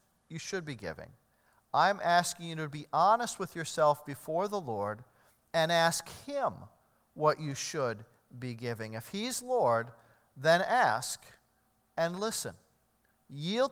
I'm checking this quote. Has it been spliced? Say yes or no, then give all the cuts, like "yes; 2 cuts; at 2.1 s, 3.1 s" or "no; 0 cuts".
no; 0 cuts